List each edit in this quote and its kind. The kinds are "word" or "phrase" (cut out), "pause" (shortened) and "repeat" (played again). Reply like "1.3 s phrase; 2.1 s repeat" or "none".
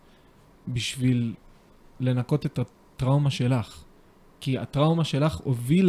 none